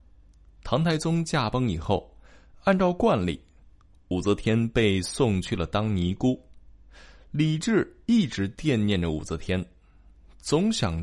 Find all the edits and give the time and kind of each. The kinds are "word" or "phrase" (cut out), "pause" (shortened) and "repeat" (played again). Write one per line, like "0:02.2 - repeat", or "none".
none